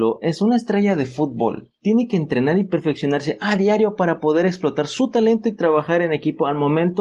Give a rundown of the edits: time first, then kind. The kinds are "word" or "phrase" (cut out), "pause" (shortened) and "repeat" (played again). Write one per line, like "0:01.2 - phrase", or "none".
none